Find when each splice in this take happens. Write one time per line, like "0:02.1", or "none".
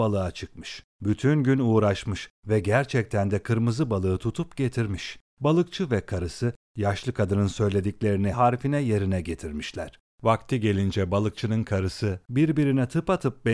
0:00.9
0:05.3
0:08.3